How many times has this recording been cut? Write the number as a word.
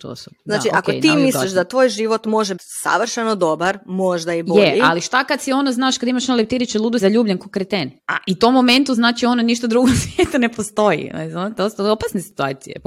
three